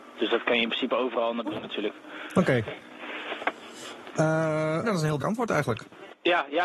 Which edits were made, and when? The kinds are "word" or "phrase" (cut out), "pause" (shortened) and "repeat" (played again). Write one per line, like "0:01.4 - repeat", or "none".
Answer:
0:01.5 - word
0:04.8 - word
0:05.2 - word

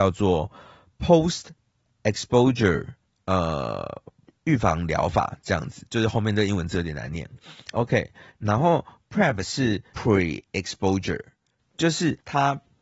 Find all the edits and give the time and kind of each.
none

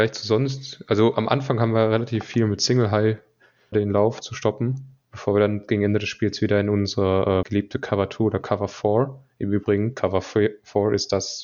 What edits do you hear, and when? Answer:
0:03.7 - phrase
0:05.0 - pause
0:07.4 - word

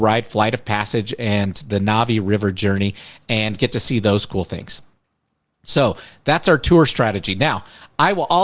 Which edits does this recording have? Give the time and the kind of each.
none

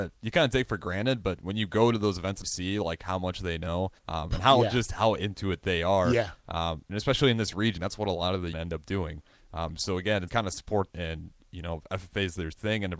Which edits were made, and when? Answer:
0:02.4 - word
0:04.0 - pause
0:07.8 - phrase
0:08.5 - phrase
0:10.3 - word
0:10.9 - word

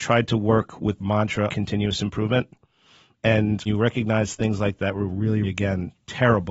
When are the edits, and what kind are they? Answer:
0:01.0 - word
0:01.5 - word
0:03.7 - word
0:04.8 - word
0:05.4 - word

